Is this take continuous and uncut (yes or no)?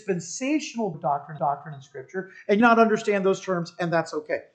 no